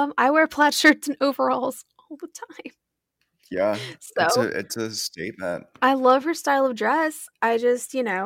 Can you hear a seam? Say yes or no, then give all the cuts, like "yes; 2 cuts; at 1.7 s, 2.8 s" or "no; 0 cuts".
no; 0 cuts